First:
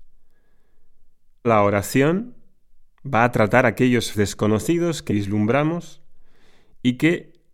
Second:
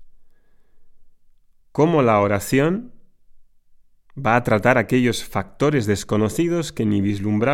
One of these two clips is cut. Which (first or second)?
first